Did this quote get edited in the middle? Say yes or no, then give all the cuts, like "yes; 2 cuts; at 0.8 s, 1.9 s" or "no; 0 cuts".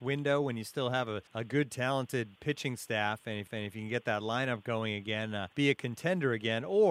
yes; 3 cuts; at 1.3 s, 3.5 s, 5.5 s